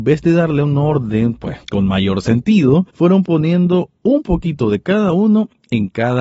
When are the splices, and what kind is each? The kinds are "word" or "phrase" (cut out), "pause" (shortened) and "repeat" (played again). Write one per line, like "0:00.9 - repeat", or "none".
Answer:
0:01.6 - pause
0:02.9 - pause